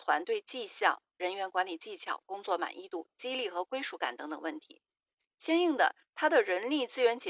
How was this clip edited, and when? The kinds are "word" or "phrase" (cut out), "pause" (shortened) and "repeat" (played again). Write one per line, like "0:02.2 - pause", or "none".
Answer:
none